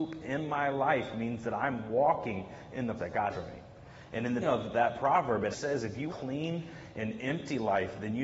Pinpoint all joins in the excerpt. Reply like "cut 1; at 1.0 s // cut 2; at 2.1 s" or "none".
cut 1; at 3.0 s // cut 2; at 3.3 s // cut 3; at 4.4 s // cut 4; at 5.5 s // cut 5; at 6.1 s

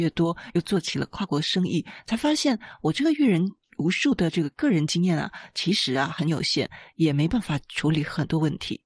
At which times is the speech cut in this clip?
none

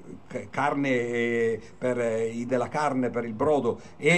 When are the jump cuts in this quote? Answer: cut 1; at 2.5 s

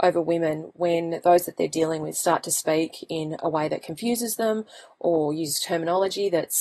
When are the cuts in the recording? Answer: none

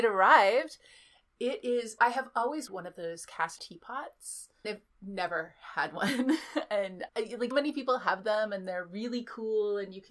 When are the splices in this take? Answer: cut 1; at 2.0 s // cut 2; at 2.7 s // cut 3; at 3.6 s // cut 4; at 4.6 s // cut 5; at 7.1 s // cut 6; at 7.5 s

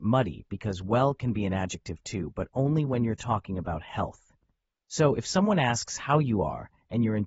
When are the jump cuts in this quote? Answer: none

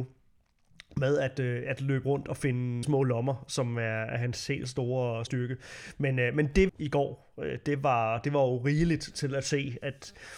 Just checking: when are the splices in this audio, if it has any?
cut 1; at 2.8 s // cut 2; at 5.3 s // cut 3; at 6.7 s

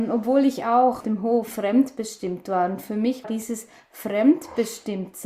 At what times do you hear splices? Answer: cut 1; at 1.0 s // cut 2; at 1.5 s // cut 3; at 3.2 s

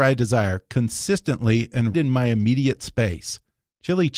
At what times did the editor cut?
cut 1; at 1.9 s

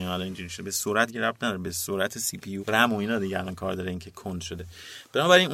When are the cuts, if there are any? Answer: cut 1; at 1.1 s // cut 2; at 2.6 s

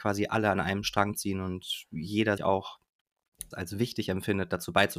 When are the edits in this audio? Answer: cut 1; at 2.4 s // cut 2; at 3.5 s

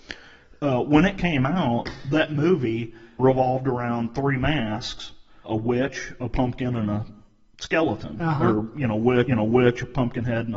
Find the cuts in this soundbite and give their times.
cut 1; at 3.2 s // cut 2; at 5.4 s // cut 3; at 9.3 s

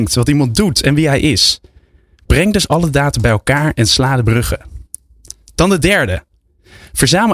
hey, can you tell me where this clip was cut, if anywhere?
none

